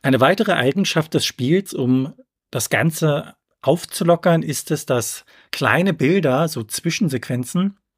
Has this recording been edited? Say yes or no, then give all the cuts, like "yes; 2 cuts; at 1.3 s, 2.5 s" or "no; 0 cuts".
no; 0 cuts